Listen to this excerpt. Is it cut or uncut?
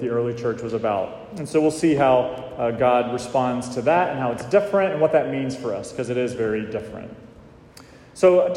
uncut